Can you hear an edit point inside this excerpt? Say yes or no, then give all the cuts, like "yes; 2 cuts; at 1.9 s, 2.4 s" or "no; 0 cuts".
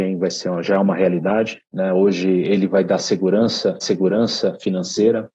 yes; 2 cuts; at 1.6 s, 3.8 s